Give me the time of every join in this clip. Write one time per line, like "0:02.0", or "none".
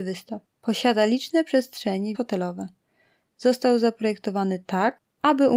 0:02.1